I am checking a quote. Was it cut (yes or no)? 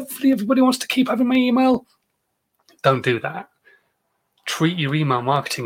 no